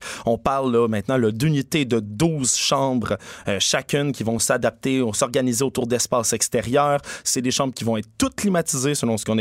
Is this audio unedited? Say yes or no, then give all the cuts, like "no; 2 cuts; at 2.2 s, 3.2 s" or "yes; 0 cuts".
yes; 0 cuts